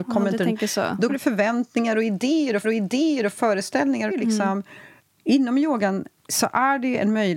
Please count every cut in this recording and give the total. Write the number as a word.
five